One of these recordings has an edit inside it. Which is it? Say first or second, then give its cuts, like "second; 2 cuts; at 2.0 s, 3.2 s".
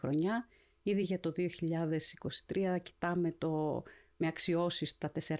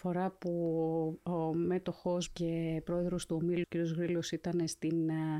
second; 2 cuts; at 2.3 s, 3.6 s